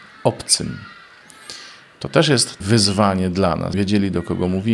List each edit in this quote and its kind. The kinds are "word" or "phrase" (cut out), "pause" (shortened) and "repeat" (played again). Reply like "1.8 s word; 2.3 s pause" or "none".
2.6 s word; 3.7 s word